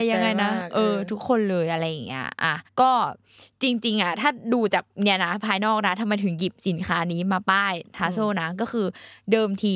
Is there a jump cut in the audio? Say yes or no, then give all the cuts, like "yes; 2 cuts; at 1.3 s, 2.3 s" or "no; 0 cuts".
yes; 1 cut; at 2.7 s